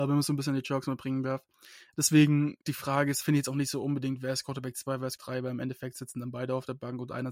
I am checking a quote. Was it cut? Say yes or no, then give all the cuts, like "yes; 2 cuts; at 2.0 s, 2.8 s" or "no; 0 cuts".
yes; 2 cuts; at 2.6 s, 5.2 s